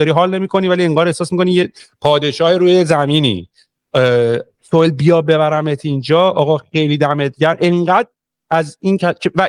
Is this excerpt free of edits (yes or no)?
yes